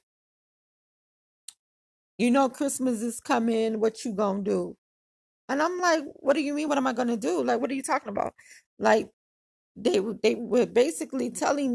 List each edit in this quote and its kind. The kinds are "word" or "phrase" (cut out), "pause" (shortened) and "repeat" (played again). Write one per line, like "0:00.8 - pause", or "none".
none